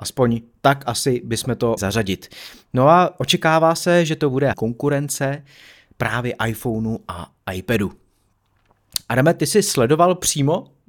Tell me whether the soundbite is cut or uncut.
cut